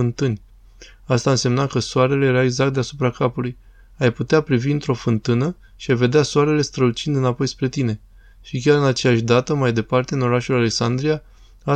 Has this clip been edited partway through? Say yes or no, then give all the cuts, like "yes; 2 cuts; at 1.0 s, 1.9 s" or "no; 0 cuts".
no; 0 cuts